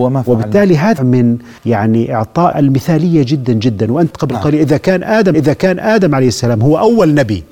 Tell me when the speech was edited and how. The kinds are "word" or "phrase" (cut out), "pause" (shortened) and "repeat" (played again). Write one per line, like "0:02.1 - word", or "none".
0:01.0 - word
0:01.6 - pause
0:02.5 - word
0:04.1 - word
0:05.3 - repeat